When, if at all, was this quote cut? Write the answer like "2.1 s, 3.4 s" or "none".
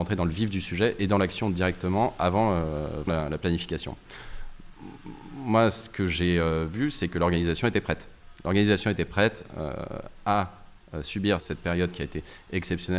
3.1 s, 11.4 s